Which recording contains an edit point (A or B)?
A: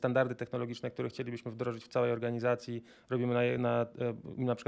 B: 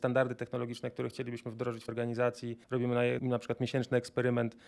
B